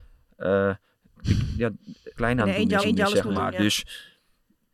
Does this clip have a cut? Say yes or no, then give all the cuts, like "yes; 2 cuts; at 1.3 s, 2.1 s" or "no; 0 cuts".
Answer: yes; 3 cuts; at 1.2 s, 2.2 s, 2.8 s